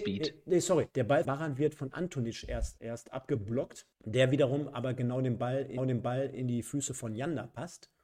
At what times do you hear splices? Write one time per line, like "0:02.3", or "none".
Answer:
0:00.9
0:01.2
0:02.8
0:03.9
0:05.8